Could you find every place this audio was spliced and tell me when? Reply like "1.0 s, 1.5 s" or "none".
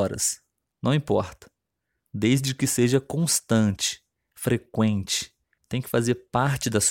none